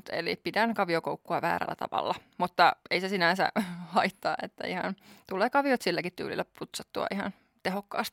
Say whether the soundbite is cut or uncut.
uncut